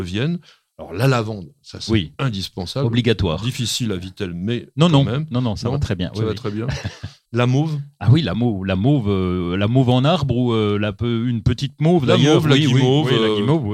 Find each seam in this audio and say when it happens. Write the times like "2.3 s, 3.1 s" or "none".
7.3 s